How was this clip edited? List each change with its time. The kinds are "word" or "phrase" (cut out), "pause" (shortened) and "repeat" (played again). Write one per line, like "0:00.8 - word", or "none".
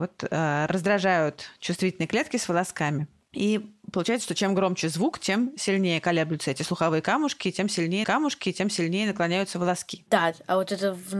0:08.0 - repeat